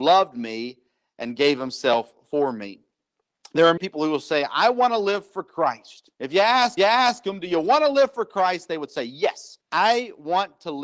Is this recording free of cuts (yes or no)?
no